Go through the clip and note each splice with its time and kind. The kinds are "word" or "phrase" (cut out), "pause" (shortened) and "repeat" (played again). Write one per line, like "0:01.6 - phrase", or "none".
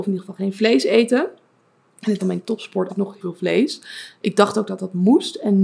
0:02.2 - word
0:02.9 - word
0:03.2 - word